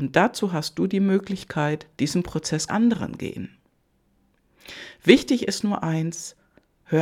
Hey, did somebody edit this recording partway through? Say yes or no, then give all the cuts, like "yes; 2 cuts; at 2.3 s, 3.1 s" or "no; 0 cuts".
yes; 2 cuts; at 1.9 s, 2.7 s